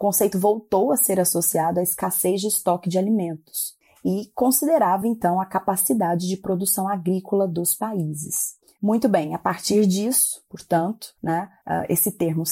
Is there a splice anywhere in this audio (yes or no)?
no